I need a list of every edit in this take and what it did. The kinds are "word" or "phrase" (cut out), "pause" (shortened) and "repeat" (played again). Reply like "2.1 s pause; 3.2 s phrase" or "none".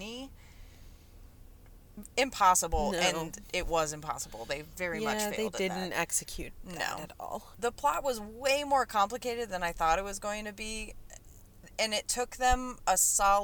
none